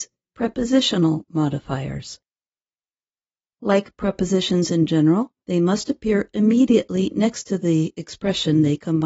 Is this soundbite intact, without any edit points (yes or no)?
no